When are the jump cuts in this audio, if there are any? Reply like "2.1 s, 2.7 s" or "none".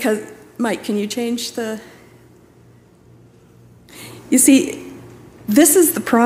none